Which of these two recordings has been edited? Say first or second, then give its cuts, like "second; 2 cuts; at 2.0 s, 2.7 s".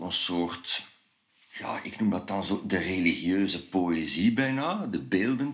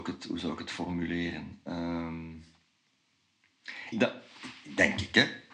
second; 1 cut; at 3.9 s